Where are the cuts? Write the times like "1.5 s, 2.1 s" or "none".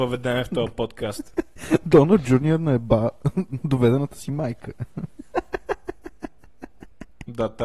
none